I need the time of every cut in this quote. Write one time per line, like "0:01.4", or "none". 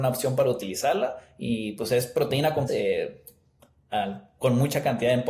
0:02.7